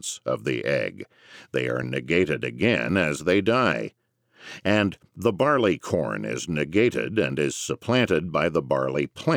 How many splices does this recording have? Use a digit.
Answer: 0